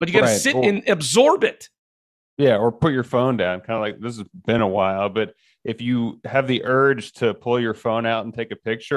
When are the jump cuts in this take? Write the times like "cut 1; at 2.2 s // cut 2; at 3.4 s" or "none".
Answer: none

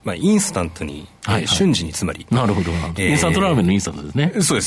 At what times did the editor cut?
none

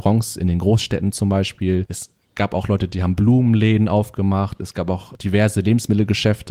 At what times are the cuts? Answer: none

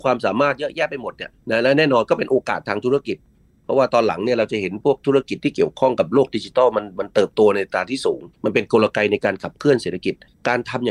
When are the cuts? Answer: cut 1; at 8.3 s

